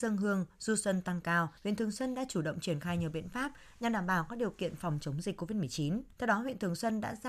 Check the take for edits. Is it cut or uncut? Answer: cut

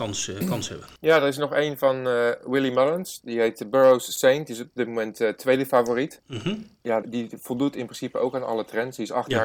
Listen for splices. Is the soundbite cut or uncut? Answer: cut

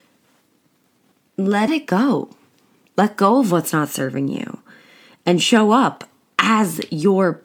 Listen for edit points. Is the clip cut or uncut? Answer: cut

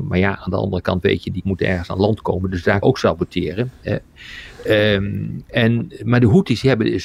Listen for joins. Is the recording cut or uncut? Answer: cut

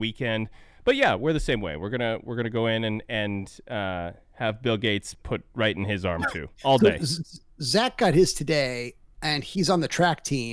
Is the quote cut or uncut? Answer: cut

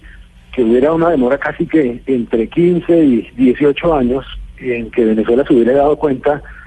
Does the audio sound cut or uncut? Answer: uncut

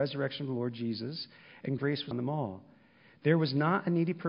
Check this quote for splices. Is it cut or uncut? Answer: cut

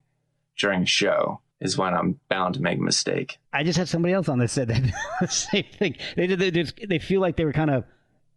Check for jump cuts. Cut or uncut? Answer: cut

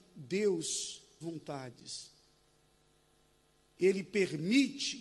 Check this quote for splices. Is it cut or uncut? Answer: cut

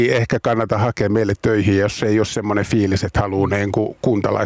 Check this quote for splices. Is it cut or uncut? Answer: uncut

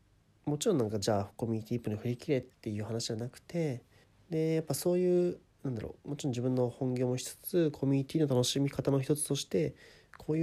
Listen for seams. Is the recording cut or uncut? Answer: cut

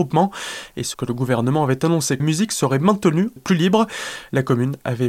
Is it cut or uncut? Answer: cut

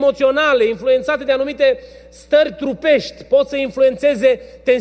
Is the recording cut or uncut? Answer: uncut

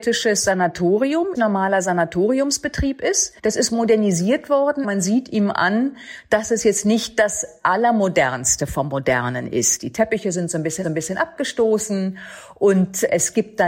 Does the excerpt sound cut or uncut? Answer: cut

